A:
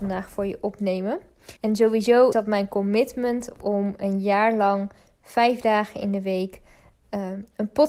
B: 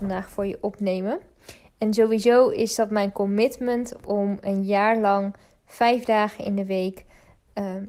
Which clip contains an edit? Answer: A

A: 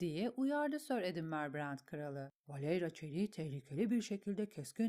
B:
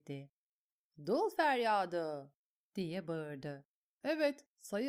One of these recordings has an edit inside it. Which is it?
A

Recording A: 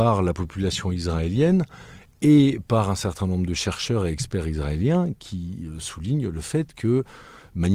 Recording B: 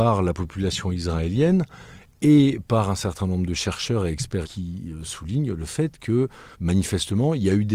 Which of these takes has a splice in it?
B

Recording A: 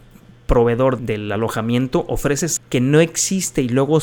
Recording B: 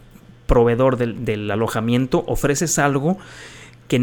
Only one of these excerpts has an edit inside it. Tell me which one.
A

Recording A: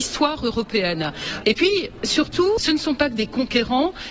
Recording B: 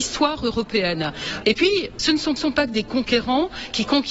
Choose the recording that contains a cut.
B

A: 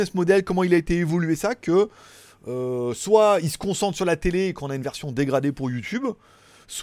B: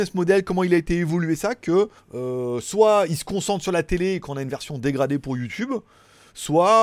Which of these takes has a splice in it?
B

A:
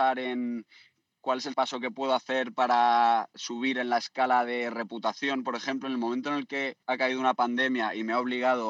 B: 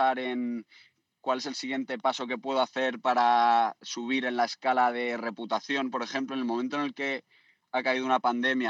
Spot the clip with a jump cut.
A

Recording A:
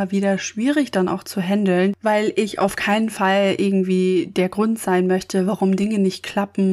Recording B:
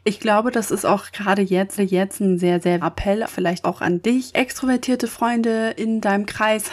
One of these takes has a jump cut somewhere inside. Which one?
B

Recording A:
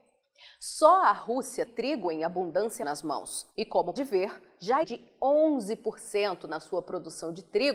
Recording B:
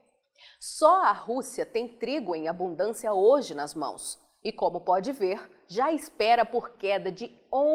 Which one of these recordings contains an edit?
A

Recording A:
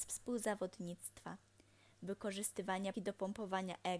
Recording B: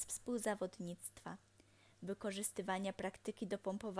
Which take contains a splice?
A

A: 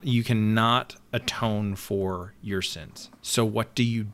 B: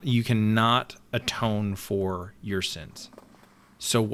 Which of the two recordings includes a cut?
A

